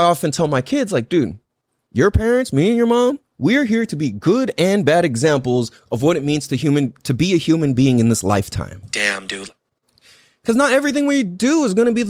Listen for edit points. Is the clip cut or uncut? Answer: cut